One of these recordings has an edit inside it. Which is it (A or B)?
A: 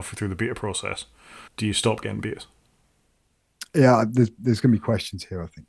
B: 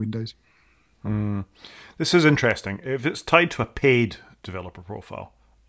A